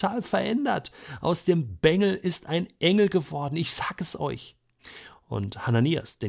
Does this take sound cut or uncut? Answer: uncut